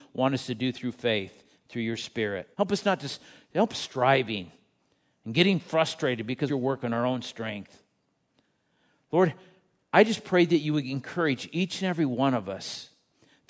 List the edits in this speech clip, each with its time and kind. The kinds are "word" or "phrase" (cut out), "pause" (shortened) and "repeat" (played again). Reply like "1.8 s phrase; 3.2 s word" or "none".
2.5 s pause; 3.7 s phrase; 6.5 s phrase